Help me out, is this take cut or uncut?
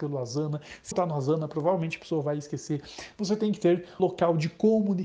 cut